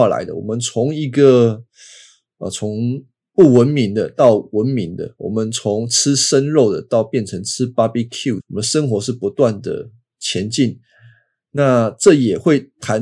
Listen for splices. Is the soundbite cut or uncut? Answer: cut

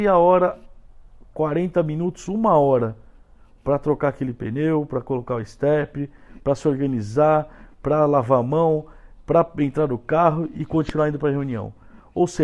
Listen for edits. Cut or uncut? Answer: uncut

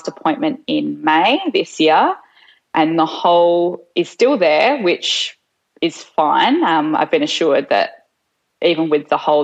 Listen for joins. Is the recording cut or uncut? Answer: uncut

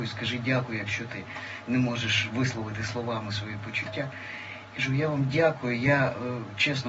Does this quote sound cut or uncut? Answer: uncut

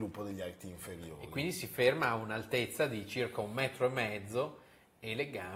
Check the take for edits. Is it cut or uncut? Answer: uncut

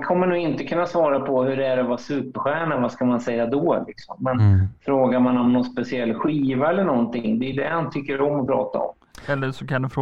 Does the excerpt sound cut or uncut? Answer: uncut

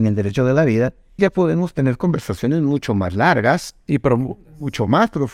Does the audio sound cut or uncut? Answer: cut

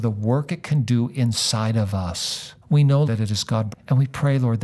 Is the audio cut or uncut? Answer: cut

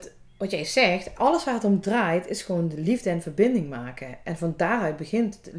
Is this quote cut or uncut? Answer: uncut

